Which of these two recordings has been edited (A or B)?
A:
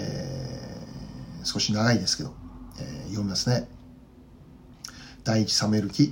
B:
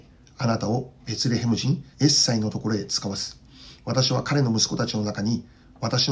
B